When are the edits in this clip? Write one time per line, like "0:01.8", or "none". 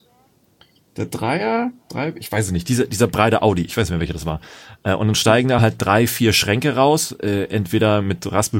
none